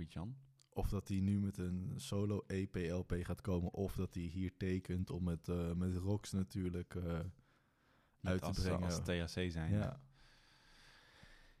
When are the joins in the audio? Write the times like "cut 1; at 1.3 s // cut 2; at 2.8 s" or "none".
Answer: none